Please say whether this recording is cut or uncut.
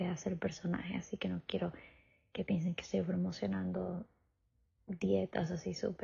uncut